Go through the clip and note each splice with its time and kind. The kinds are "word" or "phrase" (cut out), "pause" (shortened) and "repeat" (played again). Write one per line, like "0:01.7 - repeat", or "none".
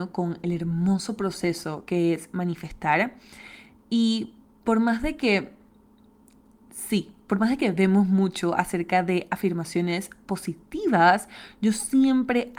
none